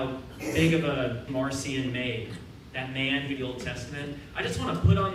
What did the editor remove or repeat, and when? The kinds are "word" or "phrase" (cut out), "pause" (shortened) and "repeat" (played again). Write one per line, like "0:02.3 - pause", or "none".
0:01.3 - word
0:03.4 - phrase